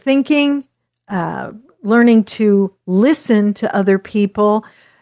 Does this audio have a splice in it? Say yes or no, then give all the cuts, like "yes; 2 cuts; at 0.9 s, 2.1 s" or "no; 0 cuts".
no; 0 cuts